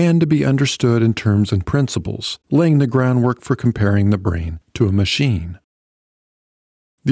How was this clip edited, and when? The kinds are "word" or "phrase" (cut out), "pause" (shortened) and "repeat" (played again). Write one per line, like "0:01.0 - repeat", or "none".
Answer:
0:01.5 - phrase
0:02.4 - pause